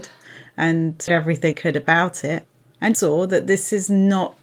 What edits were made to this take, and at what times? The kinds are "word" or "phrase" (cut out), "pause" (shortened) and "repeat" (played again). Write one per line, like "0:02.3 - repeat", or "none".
0:01.1 - word
0:01.5 - word
0:02.9 - word